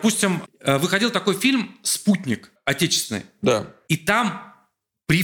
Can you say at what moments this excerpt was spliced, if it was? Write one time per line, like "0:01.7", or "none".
0:02.6